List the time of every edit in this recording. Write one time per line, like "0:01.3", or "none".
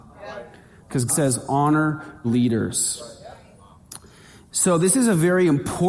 0:01.1
0:02.2